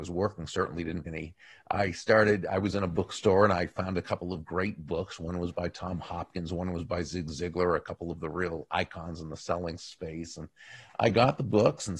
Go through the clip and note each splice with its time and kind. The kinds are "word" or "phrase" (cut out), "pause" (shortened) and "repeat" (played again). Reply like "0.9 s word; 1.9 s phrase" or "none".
1.1 s word